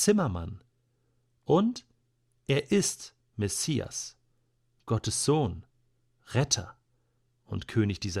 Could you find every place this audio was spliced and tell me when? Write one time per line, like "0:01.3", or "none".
none